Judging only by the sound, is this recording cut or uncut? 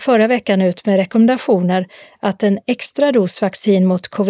uncut